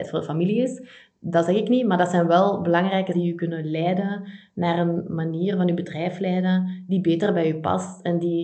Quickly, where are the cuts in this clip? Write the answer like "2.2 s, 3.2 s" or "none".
3.1 s